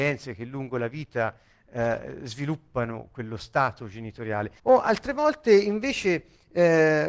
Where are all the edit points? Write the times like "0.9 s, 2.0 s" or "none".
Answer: 4.6 s